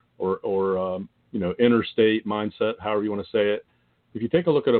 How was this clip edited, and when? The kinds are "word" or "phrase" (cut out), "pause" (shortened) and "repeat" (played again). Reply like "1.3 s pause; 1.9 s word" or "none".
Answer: none